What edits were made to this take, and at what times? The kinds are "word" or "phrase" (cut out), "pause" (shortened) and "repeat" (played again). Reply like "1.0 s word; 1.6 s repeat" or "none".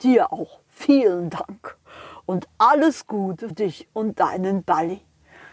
3.5 s word